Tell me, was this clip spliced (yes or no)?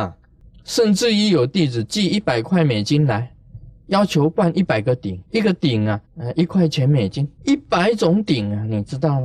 yes